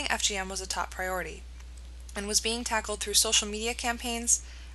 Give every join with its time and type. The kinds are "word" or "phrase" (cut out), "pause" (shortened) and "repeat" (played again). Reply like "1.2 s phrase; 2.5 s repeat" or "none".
none